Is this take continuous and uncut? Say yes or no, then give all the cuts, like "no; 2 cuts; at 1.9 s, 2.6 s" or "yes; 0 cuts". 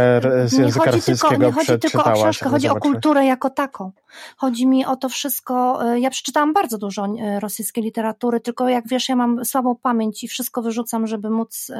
yes; 0 cuts